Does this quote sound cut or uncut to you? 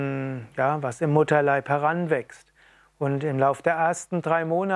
uncut